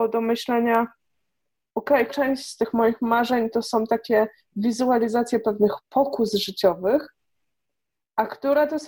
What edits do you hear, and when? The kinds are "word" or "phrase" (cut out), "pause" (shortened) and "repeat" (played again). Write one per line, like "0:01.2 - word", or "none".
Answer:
0:02.1 - word